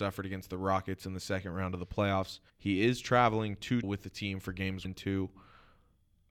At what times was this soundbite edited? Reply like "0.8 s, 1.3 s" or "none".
2.5 s, 3.8 s, 4.8 s